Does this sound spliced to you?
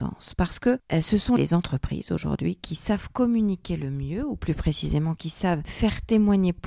no; 0 cuts

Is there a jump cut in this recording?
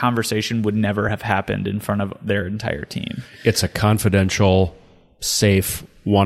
no; 0 cuts

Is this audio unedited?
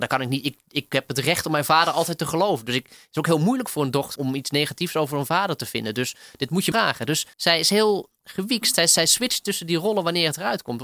no; 3 cuts; at 4.2 s, 6.7 s, 7.3 s

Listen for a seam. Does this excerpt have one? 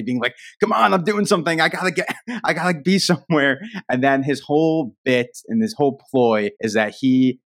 yes; 1 cut; at 6.5 s

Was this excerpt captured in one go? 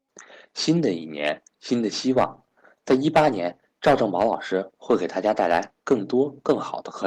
yes; 0 cuts

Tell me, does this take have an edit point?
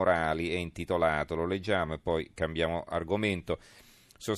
no; 0 cuts

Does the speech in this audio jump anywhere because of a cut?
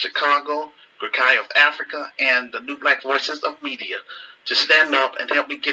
no; 0 cuts

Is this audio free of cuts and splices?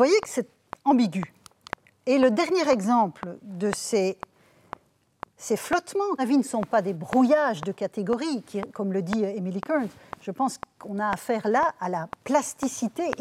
no; 1 cut; at 6.2 s

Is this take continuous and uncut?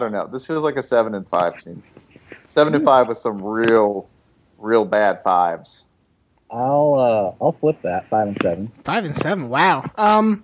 yes; 0 cuts

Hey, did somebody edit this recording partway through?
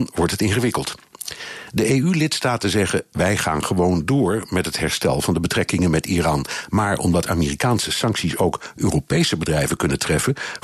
no; 0 cuts

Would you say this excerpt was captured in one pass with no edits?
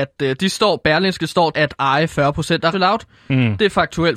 no; 2 cuts; at 1.5 s, 2.7 s

